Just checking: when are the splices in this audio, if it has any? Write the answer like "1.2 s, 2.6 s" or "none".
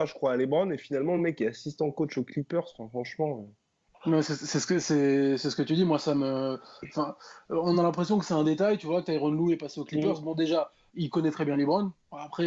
none